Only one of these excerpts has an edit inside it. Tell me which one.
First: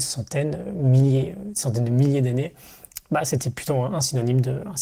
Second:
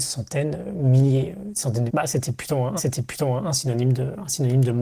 second; 2 cuts; at 1.9 s, 2.8 s

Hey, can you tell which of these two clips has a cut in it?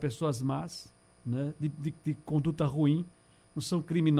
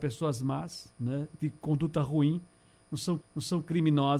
second; 3 cuts; at 0.9 s, 1.3 s, 3.2 s

